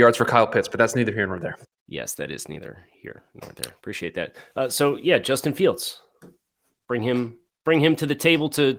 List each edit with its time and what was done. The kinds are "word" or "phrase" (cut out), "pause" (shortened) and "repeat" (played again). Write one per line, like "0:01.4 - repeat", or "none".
none